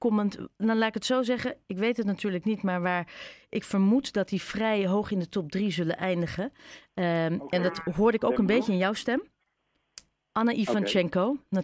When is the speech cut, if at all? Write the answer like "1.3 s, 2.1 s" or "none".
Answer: none